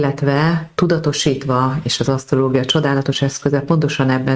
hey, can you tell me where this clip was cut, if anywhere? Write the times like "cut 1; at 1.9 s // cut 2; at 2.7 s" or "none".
none